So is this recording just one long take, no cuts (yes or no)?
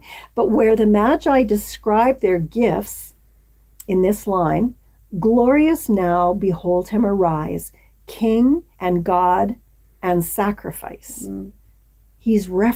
no